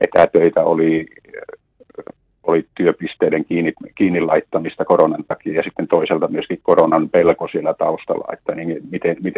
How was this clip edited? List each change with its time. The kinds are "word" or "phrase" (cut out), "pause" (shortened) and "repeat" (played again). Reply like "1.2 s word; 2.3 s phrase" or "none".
none